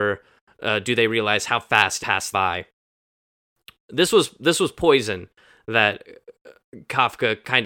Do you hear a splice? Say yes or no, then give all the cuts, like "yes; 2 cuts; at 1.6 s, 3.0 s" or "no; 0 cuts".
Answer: yes; 2 cuts; at 2.0 s, 2.3 s